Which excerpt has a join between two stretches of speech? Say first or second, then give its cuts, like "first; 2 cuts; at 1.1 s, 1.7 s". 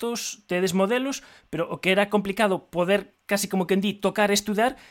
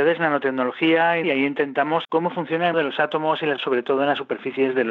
second; 4 cuts; at 1.2 s, 2.0 s, 2.7 s, 3.6 s